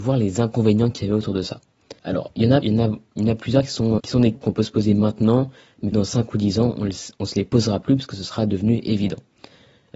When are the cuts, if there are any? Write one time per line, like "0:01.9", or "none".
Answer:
0:02.0
0:02.6
0:04.0
0:04.3
0:05.9